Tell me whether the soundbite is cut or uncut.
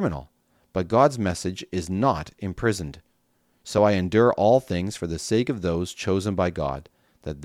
uncut